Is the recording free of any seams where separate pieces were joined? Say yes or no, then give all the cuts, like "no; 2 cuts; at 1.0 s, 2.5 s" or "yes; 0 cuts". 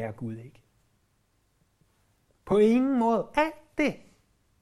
yes; 0 cuts